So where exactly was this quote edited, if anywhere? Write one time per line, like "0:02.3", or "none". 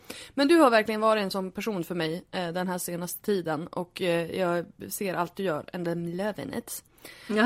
none